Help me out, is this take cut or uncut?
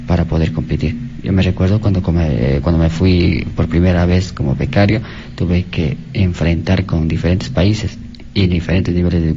uncut